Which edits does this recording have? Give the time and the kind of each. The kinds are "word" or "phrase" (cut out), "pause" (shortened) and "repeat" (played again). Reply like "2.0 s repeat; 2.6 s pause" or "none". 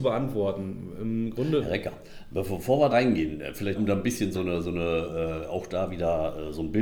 2.9 s word; 3.7 s word; 4.3 s word